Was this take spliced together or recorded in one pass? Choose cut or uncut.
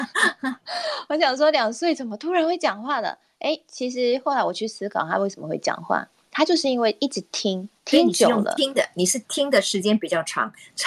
cut